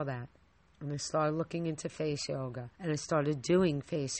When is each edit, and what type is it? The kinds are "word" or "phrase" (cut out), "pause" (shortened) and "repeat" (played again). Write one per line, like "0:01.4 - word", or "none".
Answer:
0:02.7 - pause